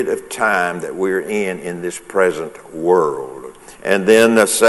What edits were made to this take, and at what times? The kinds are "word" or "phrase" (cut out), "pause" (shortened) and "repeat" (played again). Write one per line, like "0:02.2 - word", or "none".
0:03.7 - pause